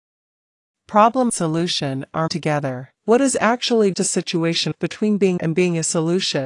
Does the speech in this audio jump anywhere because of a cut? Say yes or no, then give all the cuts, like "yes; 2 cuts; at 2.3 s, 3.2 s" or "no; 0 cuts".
yes; 6 cuts; at 1.3 s, 2.3 s, 3.0 s, 3.9 s, 4.7 s, 5.4 s